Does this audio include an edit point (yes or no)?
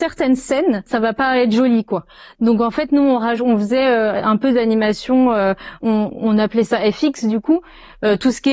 no